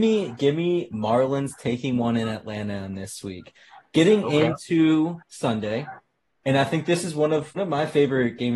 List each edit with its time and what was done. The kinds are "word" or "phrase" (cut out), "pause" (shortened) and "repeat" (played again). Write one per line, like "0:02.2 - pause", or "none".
0:05.2 - pause
0:07.6 - word